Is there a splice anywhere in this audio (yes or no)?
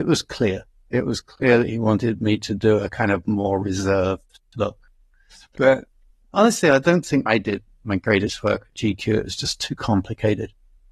no